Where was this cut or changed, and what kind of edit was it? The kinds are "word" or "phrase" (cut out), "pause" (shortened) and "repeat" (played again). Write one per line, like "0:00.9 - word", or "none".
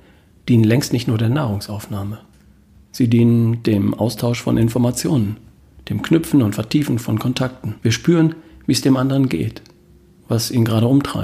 0:07.8 - pause